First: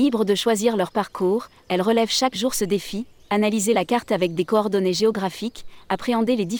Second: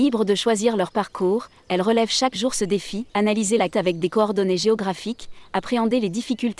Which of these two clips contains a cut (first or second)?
second